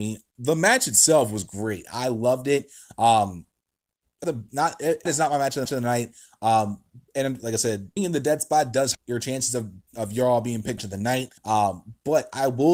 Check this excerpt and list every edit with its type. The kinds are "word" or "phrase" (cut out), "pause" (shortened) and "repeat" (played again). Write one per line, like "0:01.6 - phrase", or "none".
0:04.2 - phrase
0:05.1 - word
0:05.7 - repeat
0:07.1 - pause
0:08.0 - word
0:08.9 - word
0:09.9 - word
0:10.8 - phrase
0:11.4 - pause

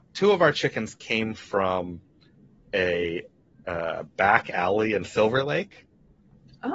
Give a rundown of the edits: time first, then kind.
none

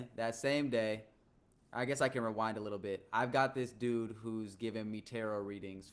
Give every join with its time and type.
none

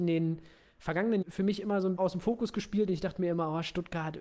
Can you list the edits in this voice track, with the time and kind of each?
0:01.2 - word
0:02.0 - word

